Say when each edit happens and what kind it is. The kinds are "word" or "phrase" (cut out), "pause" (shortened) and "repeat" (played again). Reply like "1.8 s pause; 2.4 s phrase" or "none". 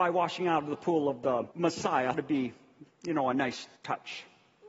1.5 s pause; 2.1 s word; 3.8 s pause